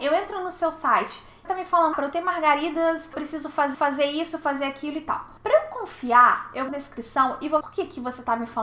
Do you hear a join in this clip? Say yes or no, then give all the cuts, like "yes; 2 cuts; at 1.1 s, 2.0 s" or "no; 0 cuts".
yes; 7 cuts; at 1.4 s, 1.9 s, 3.1 s, 3.7 s, 5.4 s, 6.7 s, 7.6 s